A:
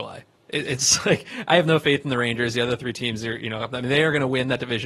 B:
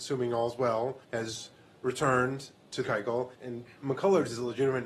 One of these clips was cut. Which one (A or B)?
B